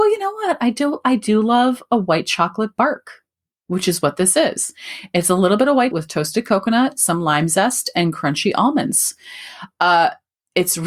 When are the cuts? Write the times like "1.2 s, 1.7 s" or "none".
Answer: 5.9 s